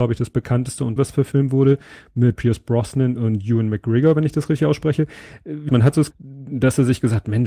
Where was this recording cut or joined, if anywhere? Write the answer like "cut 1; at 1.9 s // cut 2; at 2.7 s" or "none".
cut 1; at 1.0 s // cut 2; at 2.4 s // cut 3; at 5.7 s // cut 4; at 6.1 s